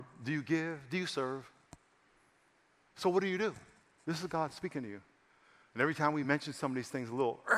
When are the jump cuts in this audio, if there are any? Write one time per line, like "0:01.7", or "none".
none